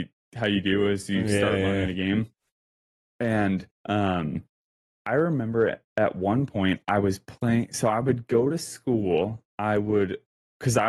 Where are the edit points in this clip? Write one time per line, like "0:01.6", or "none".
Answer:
0:03.8
0:09.5

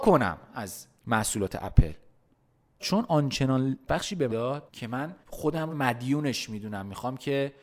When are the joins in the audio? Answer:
0:01.0
0:02.8
0:03.9
0:04.3
0:04.7
0:05.2
0:05.7

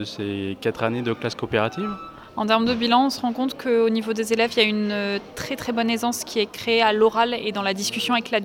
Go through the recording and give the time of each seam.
none

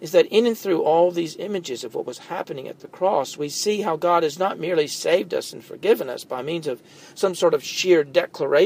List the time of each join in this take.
none

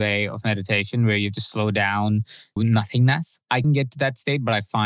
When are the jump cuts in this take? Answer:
0:02.6
0:03.6

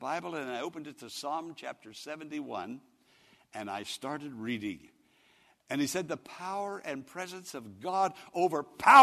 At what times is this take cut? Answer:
none

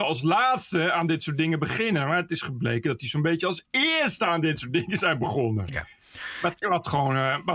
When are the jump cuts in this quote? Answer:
0:06.6

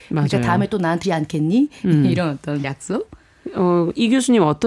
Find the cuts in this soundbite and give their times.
0:01.0
0:02.6

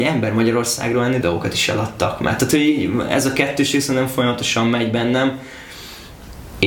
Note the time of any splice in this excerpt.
0:01.2

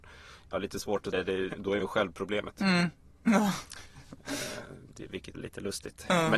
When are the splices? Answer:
0:01.1
0:01.5
0:01.8
0:05.3

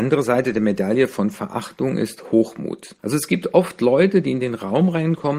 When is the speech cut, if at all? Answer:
0:03.0

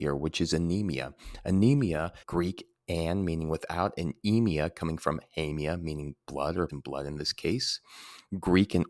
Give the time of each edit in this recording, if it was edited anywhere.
0:02.2
0:06.7

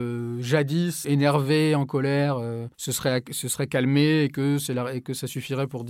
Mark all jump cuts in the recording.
0:01.0
0:02.7

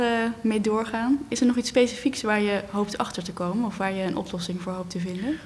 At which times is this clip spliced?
none

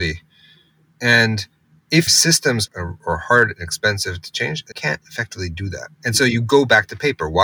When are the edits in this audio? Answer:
0:02.1
0:02.7
0:04.7
0:05.0
0:05.9

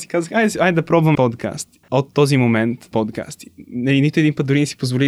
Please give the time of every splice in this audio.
0:01.1
0:01.8
0:02.9

